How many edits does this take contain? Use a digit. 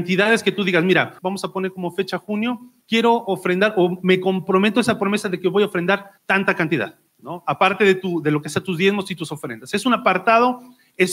4